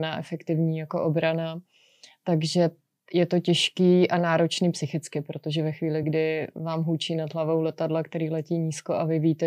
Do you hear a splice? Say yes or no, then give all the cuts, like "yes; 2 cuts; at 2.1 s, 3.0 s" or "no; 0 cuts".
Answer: no; 0 cuts